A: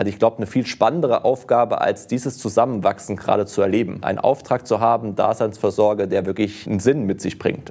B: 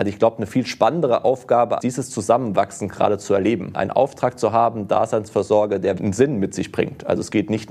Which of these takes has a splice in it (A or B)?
B